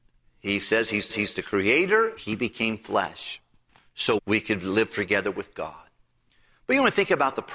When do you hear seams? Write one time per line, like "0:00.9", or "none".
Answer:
0:01.1
0:02.2
0:04.2